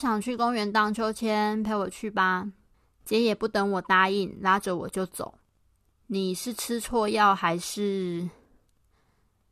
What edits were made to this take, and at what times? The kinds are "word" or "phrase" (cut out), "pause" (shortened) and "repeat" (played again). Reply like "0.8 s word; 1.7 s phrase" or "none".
2.7 s pause